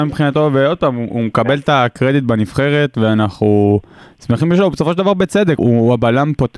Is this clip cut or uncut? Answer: cut